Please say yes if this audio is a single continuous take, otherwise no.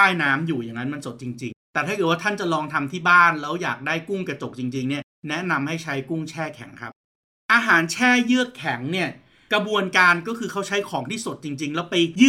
no